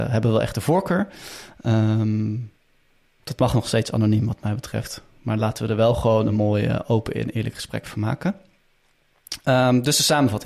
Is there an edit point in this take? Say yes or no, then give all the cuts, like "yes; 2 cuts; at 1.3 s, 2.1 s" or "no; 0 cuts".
no; 0 cuts